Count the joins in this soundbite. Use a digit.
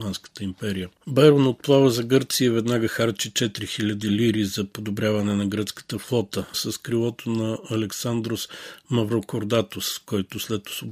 2